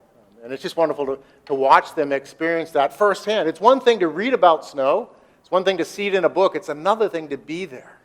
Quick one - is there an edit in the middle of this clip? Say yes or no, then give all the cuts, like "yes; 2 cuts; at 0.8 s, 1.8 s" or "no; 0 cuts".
no; 0 cuts